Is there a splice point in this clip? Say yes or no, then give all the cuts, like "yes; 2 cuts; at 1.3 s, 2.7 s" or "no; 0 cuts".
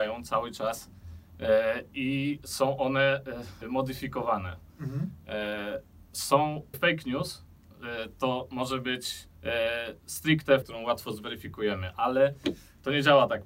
yes; 4 cuts; at 3.6 s, 6.7 s, 9.3 s, 10.6 s